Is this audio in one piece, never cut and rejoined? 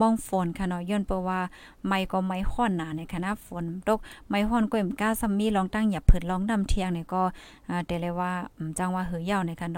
yes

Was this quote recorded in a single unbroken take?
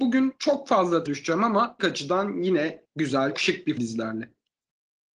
no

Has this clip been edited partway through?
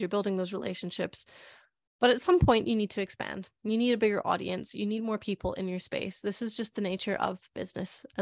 no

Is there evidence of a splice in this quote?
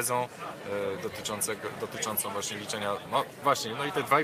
no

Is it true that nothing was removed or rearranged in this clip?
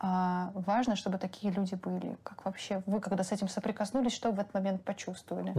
yes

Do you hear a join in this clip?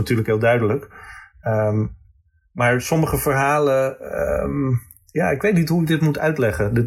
no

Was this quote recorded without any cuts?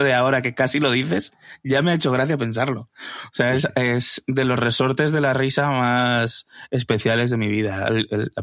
yes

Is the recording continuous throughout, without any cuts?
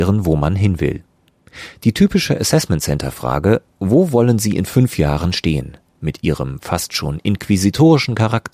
yes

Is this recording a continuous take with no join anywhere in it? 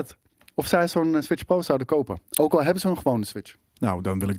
yes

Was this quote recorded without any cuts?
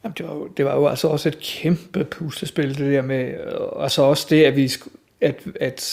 yes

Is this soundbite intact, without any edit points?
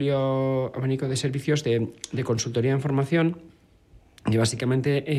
yes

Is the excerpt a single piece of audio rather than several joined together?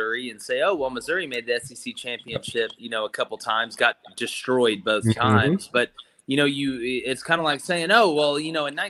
yes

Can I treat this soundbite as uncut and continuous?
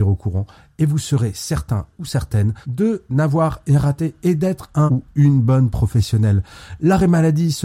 no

